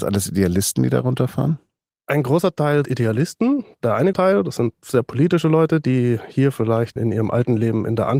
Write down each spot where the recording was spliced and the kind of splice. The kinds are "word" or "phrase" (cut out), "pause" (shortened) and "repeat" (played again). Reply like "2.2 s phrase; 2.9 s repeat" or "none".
2.8 s word; 4.1 s word; 7.0 s word

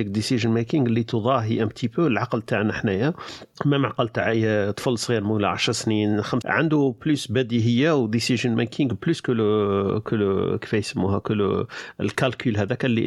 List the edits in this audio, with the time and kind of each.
3.5 s pause; 6.4 s word

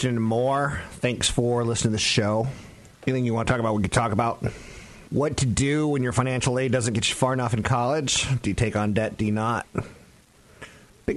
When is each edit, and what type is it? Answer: 2.9 s pause; 5.1 s pause

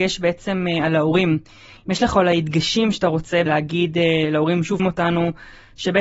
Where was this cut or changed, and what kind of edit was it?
3.5 s word; 4.8 s word

